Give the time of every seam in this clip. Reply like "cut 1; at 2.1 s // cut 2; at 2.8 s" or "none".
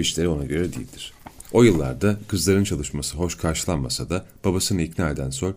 none